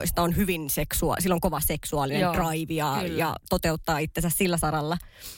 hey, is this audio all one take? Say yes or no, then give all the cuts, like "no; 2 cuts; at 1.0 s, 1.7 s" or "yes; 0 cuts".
yes; 0 cuts